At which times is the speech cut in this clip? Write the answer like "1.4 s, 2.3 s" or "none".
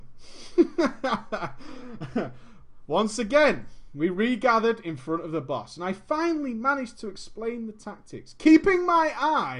none